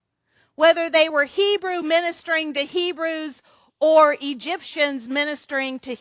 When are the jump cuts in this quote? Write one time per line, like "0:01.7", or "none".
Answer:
none